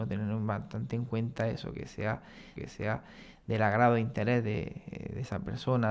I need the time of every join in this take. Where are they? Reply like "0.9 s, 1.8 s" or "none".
2.6 s